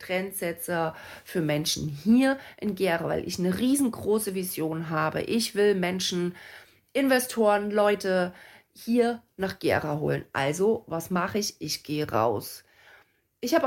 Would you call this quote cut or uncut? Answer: uncut